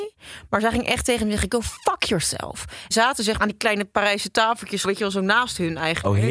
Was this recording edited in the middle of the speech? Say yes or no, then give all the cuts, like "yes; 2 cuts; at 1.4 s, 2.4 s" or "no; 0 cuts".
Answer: yes; 3 cuts; at 2.9 s, 3.4 s, 4.8 s